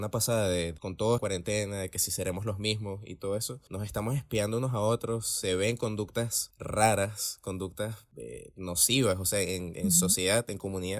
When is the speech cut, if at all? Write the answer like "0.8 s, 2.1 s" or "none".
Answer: 1.2 s